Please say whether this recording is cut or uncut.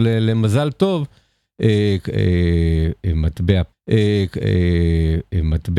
cut